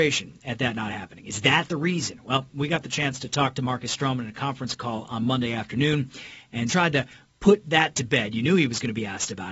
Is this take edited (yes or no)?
yes